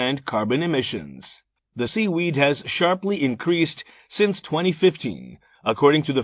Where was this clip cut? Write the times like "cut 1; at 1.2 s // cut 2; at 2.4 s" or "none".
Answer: cut 1; at 1.9 s